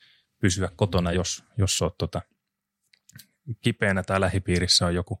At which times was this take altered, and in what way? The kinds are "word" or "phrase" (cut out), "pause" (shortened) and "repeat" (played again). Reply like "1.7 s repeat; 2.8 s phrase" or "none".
none